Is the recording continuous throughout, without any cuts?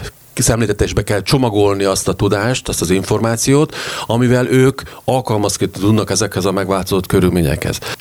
yes; 0 cuts

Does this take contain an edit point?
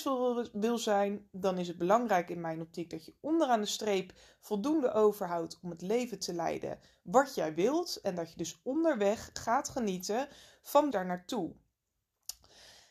yes; 1 cut; at 10.9 s

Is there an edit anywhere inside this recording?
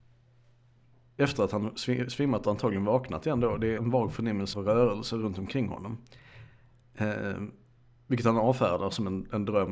yes; 2 cuts; at 3.8 s, 4.5 s

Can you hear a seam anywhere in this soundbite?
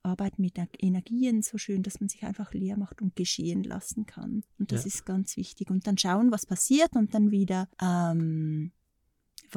yes; 2 cuts; at 4.5 s, 7.7 s

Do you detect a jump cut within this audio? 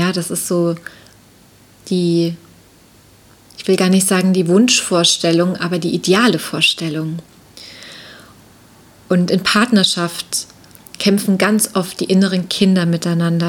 no; 0 cuts

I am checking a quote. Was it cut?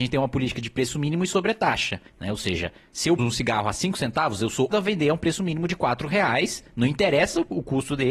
yes; 3 cuts; at 2.1 s, 3.2 s, 4.7 s

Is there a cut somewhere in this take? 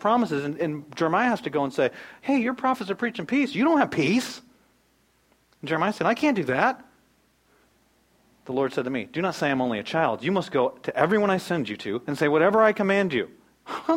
no; 0 cuts

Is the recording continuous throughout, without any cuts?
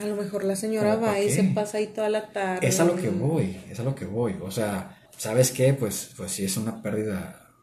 no; 1 cut; at 5.1 s

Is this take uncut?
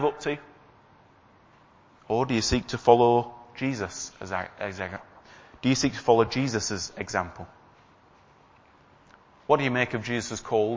yes; 0 cuts

